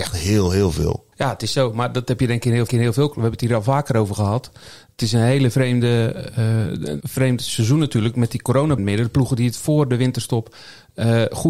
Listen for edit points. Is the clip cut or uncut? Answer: cut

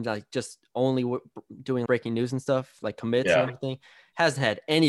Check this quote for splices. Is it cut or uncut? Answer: cut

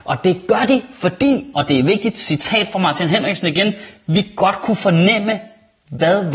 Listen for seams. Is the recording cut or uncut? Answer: uncut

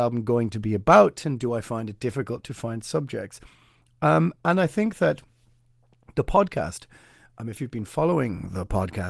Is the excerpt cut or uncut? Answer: uncut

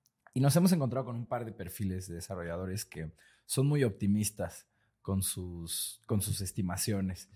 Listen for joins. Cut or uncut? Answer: uncut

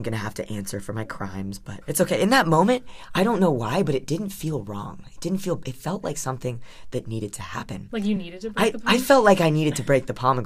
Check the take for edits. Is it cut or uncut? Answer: uncut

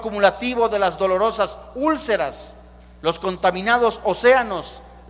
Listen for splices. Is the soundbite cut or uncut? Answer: uncut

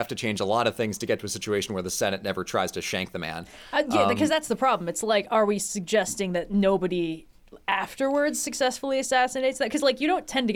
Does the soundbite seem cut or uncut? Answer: uncut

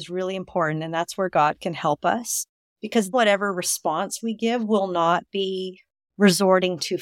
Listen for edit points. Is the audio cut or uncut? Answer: cut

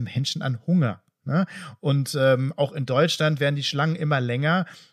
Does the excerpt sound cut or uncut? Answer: uncut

